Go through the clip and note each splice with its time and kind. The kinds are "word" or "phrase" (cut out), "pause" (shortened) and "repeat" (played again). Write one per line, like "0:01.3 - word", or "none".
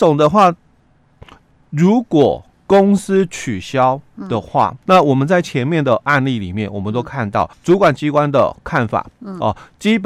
0:02.5 - pause
0:04.9 - word
0:07.5 - pause